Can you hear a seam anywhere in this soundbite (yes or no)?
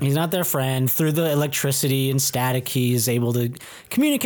no